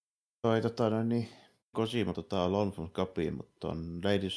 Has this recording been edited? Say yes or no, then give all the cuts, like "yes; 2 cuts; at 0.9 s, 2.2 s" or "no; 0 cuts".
yes; 2 cuts; at 1.7 s, 2.1 s